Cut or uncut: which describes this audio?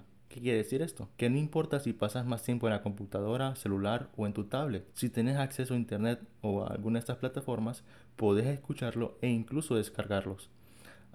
cut